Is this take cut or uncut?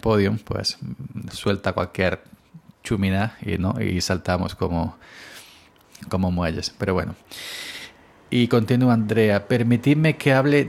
cut